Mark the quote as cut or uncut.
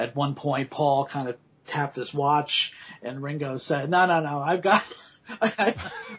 uncut